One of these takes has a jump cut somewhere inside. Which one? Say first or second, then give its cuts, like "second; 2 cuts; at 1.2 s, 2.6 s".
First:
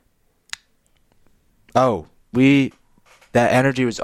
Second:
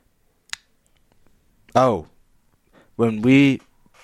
first; 1 cut; at 2.3 s